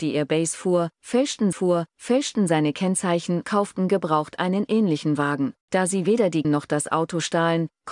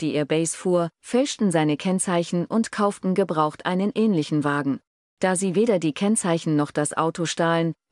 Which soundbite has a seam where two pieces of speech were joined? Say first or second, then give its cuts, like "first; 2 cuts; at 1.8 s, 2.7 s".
first; 4 cuts; at 1.5 s, 3.4 s, 5.6 s, 6.4 s